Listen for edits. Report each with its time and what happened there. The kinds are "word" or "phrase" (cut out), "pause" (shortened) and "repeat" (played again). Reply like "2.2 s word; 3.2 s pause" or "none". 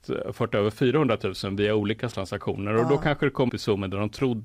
2.1 s word; 3.5 s word